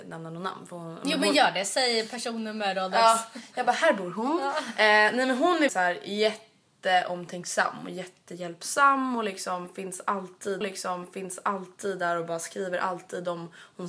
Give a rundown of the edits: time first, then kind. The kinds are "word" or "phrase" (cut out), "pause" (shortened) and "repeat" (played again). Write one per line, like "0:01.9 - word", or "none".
0:05.7 - word
0:10.6 - repeat

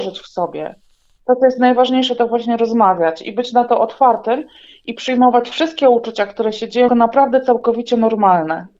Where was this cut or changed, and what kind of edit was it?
0:06.9 - word

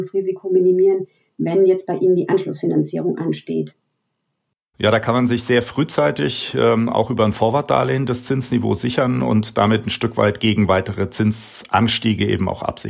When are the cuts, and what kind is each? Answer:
none

